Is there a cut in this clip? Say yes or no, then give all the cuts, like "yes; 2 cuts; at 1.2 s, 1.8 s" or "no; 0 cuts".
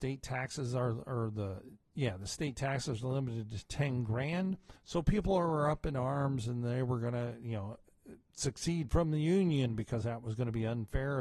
yes; 1 cut; at 4.8 s